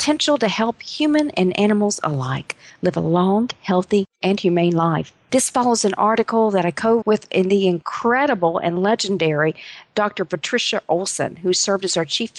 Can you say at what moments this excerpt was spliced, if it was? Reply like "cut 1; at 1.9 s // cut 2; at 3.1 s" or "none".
cut 1; at 7.0 s